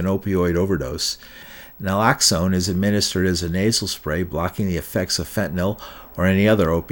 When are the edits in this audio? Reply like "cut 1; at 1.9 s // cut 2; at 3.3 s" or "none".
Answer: none